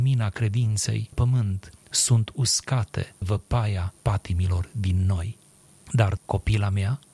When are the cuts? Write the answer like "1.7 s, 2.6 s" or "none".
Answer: 1.1 s, 3.2 s, 4.0 s, 6.2 s